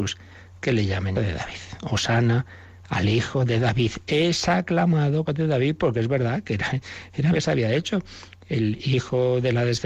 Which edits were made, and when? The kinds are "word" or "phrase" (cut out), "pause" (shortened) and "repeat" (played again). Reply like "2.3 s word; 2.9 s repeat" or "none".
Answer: 1.1 s word; 5.3 s phrase; 7.3 s phrase